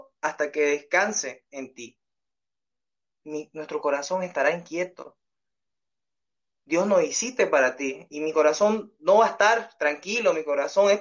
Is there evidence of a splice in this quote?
no; 0 cuts

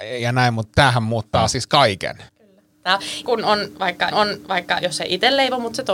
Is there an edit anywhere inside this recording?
yes; 4 cuts; at 1.3 s, 2.3 s, 3.2 s, 4.1 s

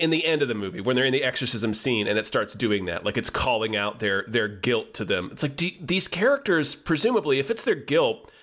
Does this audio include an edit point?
no; 0 cuts

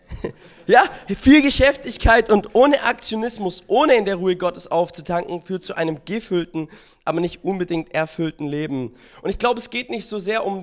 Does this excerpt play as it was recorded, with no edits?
yes; 0 cuts

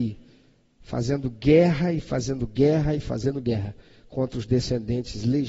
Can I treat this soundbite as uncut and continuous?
yes; 0 cuts

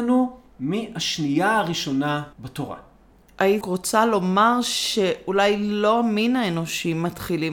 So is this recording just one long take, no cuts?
no; 2 cuts; at 2.3 s, 3.6 s

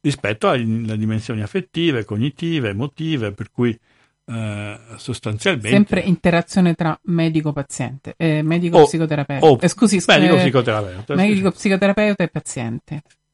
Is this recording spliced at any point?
no; 0 cuts

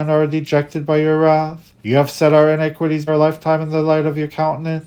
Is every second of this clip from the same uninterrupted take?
no; 2 cuts; at 1.8 s, 3.1 s

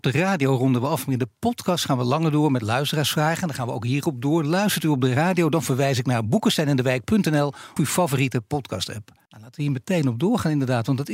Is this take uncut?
no; 2 cuts; at 7.8 s, 9.3 s

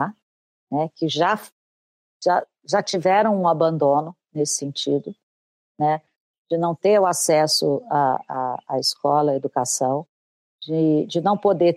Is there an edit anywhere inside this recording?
no; 0 cuts

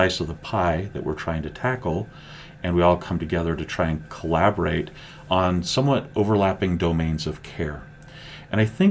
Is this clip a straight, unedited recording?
yes; 0 cuts

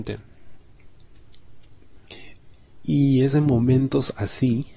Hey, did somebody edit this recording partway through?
no; 0 cuts

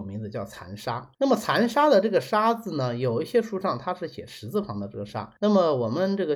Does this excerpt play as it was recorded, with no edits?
no; 2 cuts; at 1.1 s, 5.4 s

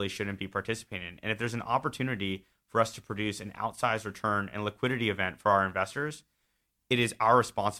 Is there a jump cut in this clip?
no; 0 cuts

